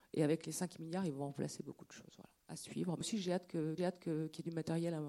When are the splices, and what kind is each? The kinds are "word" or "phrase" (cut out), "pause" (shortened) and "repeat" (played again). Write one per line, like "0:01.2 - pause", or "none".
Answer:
0:02.4 - pause
0:03.0 - word
0:03.8 - repeat